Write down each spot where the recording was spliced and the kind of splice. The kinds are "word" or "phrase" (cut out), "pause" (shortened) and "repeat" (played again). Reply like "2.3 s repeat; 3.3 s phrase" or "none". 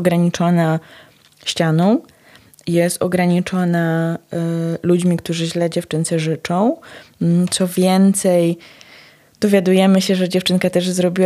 none